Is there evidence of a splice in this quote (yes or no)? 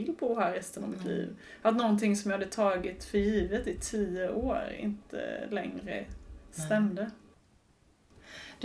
no